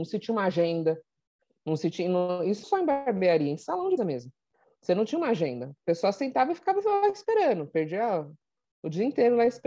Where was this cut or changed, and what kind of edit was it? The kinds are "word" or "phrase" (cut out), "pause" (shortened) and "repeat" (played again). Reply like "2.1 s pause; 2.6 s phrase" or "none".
2.6 s word; 4.0 s word